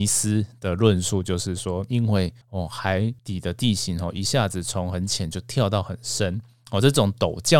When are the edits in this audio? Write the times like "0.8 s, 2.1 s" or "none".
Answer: 2.4 s, 3.2 s

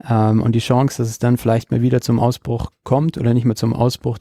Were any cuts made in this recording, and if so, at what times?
none

